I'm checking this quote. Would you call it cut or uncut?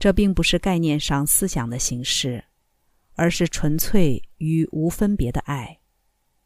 uncut